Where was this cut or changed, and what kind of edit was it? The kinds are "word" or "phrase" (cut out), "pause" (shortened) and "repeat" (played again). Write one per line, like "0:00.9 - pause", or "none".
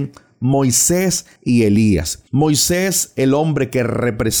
0:01.4 - pause
0:02.3 - pause